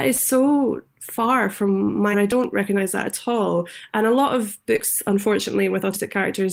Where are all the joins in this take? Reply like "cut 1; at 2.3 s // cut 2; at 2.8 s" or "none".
cut 1; at 2.1 s